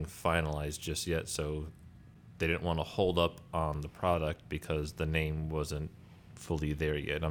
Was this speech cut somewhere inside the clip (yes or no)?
no